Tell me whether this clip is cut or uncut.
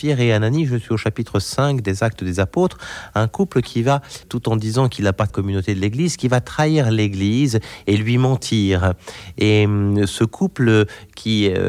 cut